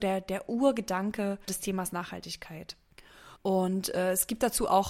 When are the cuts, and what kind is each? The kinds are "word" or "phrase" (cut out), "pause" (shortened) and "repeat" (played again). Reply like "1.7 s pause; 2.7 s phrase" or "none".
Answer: 3.4 s pause